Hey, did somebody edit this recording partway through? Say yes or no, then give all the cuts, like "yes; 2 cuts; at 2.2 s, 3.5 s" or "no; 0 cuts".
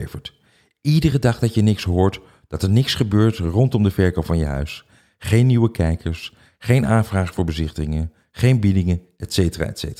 no; 0 cuts